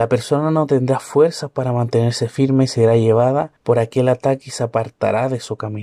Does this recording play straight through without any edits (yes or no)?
no